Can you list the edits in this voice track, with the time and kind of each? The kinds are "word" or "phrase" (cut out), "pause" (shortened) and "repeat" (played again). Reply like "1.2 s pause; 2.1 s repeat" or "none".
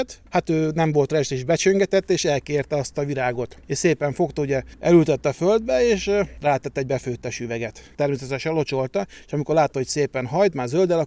none